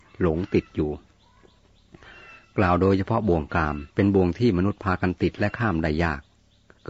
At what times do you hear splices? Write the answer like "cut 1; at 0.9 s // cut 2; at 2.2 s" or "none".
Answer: cut 1; at 3.9 s